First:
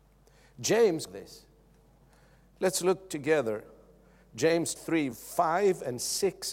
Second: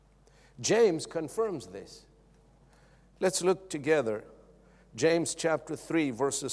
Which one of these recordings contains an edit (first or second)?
first